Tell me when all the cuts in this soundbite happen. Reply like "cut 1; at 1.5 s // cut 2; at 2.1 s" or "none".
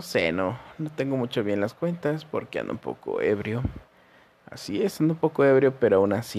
none